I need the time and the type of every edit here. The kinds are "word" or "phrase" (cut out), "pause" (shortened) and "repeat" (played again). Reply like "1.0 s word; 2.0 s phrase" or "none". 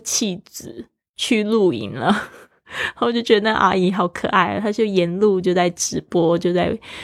none